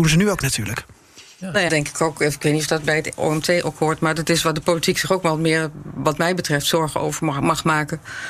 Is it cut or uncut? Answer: cut